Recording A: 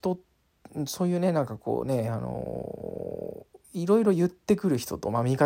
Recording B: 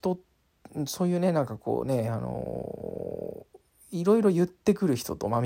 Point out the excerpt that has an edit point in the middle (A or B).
A